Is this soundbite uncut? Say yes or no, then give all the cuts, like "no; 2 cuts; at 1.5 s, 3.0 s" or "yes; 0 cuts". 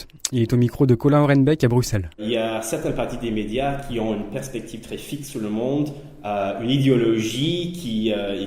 no; 1 cut; at 2.1 s